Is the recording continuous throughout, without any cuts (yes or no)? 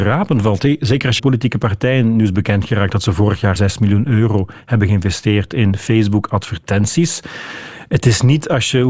no